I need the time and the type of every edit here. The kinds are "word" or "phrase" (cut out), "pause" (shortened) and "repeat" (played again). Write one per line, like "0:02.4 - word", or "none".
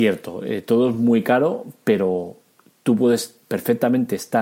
none